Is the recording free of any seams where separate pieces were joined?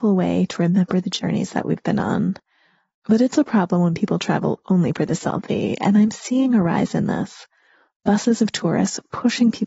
yes; 0 cuts

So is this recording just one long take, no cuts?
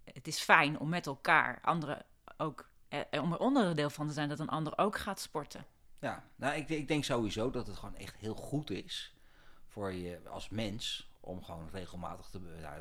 yes; 0 cuts

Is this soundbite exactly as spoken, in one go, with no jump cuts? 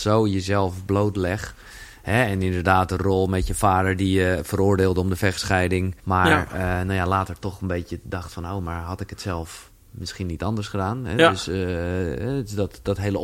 no; 1 cut; at 6.0 s

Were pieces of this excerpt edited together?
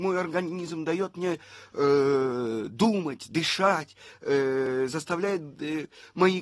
no; 0 cuts

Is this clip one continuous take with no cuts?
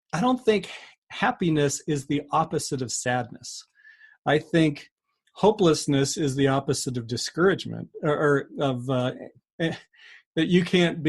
yes; 0 cuts

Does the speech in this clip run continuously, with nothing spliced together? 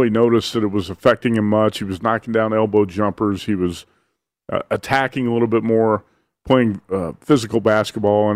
yes; 0 cuts

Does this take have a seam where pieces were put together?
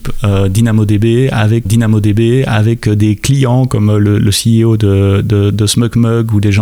yes; 1 cut; at 1.6 s

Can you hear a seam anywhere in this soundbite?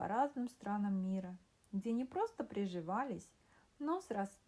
no; 0 cuts

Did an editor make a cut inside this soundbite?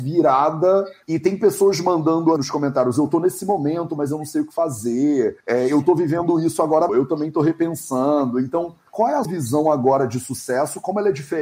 yes; 4 cuts; at 2.4 s, 5.4 s, 6.9 s, 9.2 s

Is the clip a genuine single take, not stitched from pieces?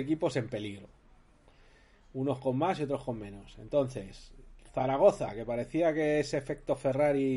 yes; 0 cuts

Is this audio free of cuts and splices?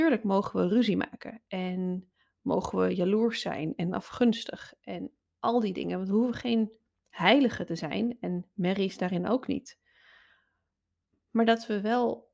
yes; 0 cuts

